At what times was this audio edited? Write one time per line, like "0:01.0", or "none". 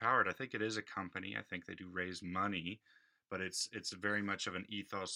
none